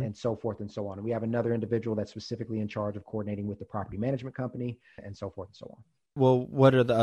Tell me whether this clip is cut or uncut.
uncut